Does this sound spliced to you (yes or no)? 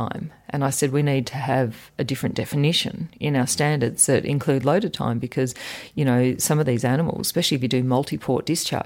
no